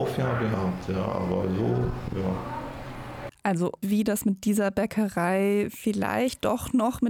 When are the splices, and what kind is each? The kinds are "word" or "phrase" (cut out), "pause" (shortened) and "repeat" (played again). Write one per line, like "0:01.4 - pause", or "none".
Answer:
0:03.8 - phrase